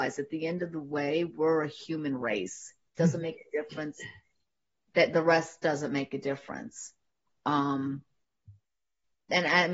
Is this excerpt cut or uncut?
uncut